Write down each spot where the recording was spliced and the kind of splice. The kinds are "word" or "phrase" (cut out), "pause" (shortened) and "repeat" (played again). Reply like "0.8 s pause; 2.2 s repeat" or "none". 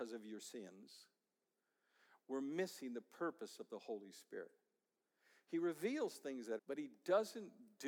6.6 s phrase